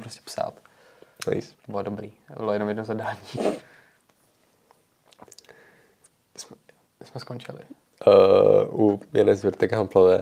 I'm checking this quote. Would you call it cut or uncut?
cut